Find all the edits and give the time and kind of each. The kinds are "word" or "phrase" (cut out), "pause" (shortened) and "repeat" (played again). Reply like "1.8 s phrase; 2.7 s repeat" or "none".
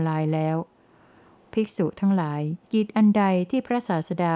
2.6 s pause